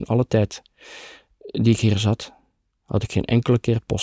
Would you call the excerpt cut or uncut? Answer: uncut